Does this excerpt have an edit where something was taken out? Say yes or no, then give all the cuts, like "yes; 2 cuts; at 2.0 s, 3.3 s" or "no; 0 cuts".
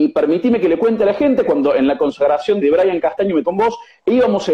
yes; 2 cuts; at 2.6 s, 3.4 s